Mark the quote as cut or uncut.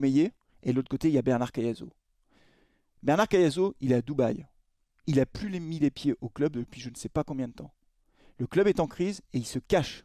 uncut